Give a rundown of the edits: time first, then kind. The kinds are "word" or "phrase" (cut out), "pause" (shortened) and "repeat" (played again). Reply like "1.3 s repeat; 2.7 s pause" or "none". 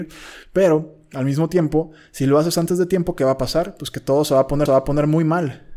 4.7 s repeat

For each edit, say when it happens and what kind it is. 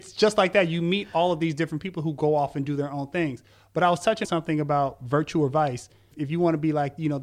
4.2 s word

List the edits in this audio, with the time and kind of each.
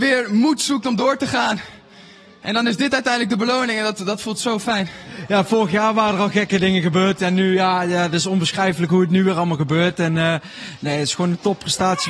none

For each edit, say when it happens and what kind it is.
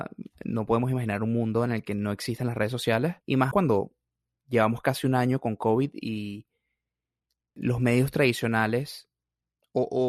3.2 s pause; 3.5 s word

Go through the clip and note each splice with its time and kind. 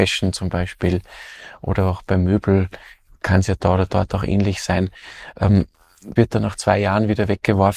6.2 s word

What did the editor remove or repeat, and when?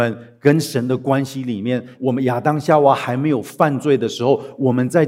1.9 s phrase

